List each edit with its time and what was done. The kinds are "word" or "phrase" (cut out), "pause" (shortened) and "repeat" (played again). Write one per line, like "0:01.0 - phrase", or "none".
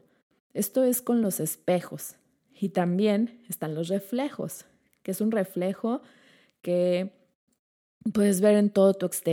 none